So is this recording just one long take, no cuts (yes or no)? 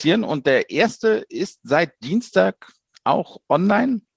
yes